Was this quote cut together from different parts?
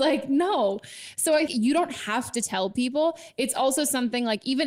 yes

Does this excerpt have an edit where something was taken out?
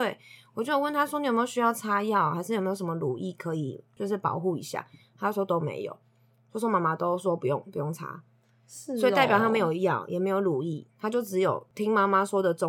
no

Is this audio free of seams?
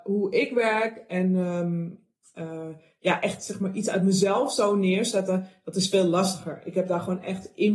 yes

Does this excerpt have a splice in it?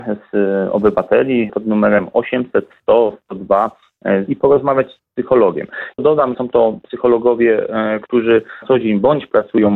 yes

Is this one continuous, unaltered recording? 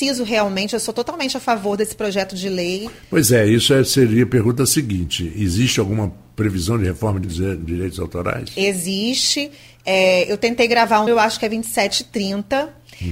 no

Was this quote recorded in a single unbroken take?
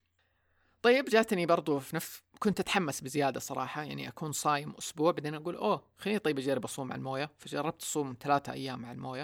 yes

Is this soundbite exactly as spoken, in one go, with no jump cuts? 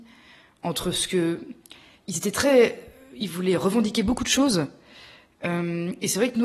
yes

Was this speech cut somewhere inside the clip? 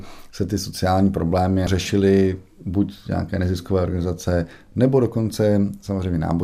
no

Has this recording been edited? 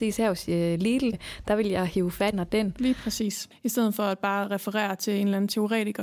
yes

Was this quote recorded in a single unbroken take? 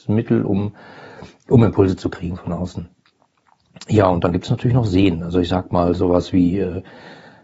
yes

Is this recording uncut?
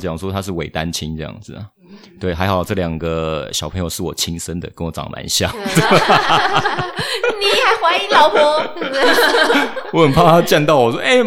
yes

